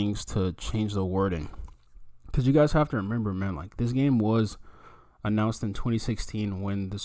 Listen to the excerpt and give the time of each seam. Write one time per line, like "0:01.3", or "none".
0:02.2

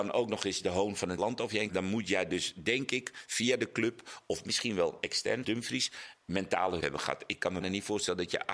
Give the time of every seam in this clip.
0:01.2
0:01.7
0:05.4
0:06.8
0:07.6

